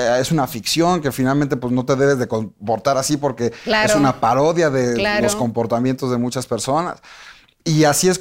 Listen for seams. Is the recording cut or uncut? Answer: uncut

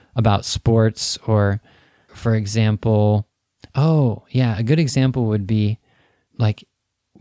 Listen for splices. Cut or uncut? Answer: cut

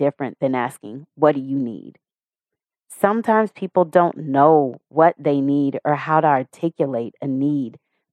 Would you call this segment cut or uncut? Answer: uncut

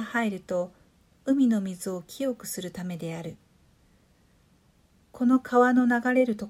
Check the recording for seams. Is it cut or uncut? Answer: uncut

